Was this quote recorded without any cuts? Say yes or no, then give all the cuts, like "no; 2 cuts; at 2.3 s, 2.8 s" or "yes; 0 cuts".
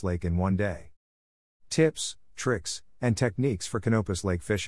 yes; 0 cuts